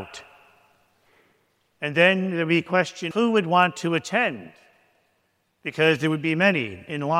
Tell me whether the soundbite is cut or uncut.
cut